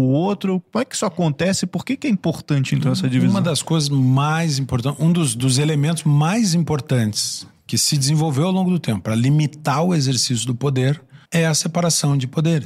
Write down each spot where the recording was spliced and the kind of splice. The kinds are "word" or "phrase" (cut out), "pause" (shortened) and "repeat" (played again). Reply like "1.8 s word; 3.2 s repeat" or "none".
11.3 s pause